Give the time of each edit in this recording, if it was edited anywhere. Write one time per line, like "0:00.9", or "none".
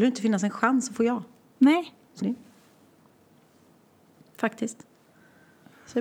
0:01.4
0:02.2